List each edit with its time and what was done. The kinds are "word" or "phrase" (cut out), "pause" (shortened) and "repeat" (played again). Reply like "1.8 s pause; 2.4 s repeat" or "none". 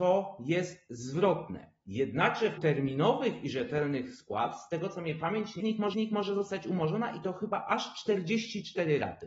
2.6 s word; 5.6 s phrase; 5.9 s repeat